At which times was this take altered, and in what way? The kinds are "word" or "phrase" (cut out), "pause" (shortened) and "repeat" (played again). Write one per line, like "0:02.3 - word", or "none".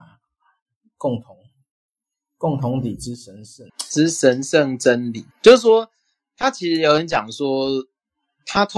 0:03.7 - pause
0:05.3 - pause